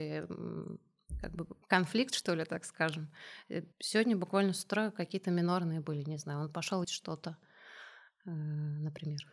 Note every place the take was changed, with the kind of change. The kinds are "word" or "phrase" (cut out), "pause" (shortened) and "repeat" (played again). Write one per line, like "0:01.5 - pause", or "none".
0:01.6 - pause
0:03.7 - pause
0:06.8 - word

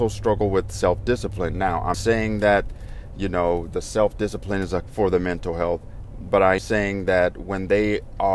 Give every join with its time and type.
0:01.9 - word
0:04.8 - word
0:06.6 - word

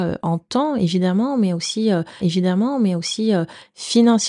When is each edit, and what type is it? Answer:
0:02.2 - repeat

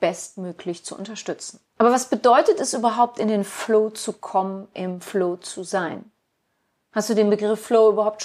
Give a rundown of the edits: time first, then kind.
0:01.7 - pause

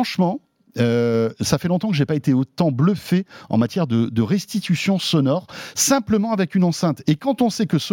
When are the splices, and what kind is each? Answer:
none

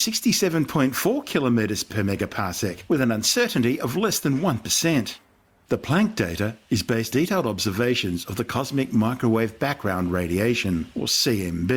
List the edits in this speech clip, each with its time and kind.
0:01.9 - word
0:07.1 - word

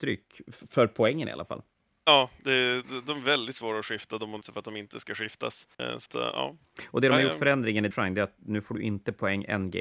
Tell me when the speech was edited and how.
0:01.8 - pause
0:04.4 - word
0:05.7 - pause
0:06.1 - word
0:07.9 - word

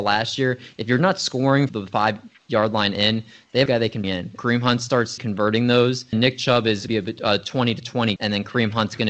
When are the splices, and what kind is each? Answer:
0:01.7 - word
0:03.7 - word
0:04.0 - word
0:04.4 - word
0:05.2 - word
0:06.1 - word
0:06.9 - word
0:08.2 - word

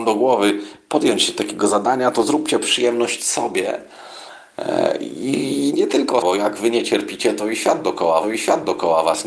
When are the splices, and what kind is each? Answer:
0:06.2 - word
0:08.2 - repeat

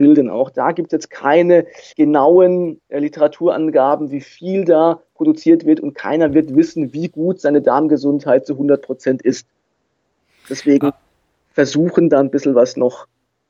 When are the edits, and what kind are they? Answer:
0:01.9 - pause

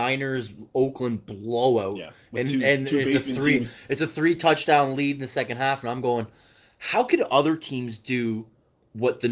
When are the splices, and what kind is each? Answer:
none

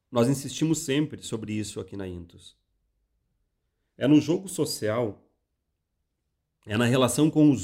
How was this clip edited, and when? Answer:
none

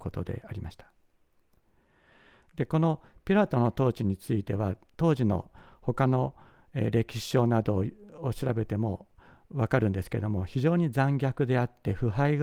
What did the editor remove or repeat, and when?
none

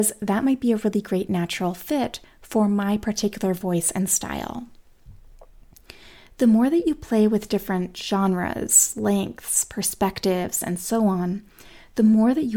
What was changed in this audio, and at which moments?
none

